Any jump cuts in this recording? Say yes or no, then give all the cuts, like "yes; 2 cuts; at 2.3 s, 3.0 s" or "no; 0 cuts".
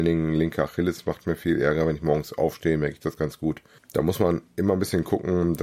no; 0 cuts